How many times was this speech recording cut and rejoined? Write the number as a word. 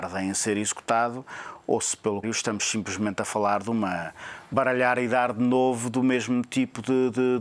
two